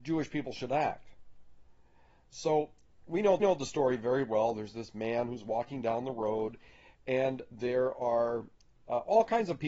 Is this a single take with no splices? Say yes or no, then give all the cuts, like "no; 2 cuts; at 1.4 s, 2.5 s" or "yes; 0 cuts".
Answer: no; 1 cut; at 3.4 s